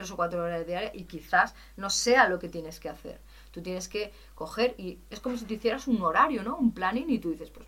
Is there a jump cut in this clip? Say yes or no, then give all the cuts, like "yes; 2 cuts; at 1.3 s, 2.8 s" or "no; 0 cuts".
no; 0 cuts